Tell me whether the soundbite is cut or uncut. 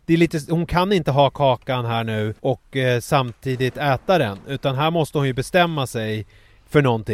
cut